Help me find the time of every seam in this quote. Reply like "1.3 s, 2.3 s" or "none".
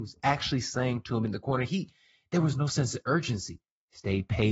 none